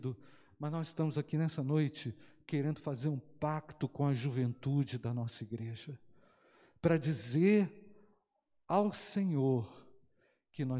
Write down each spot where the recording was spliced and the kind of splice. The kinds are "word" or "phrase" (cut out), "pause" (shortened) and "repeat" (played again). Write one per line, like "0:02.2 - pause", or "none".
none